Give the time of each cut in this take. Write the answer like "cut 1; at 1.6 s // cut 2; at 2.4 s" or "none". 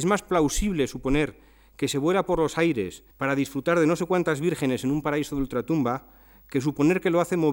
cut 1; at 3.1 s